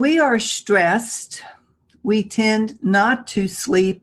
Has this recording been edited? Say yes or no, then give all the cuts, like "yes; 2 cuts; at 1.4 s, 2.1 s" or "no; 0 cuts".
no; 0 cuts